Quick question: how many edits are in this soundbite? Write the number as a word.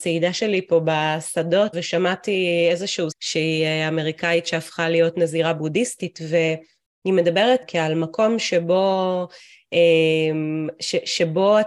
three